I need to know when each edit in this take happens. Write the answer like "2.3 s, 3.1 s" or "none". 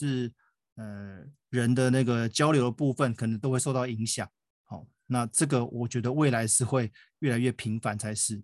none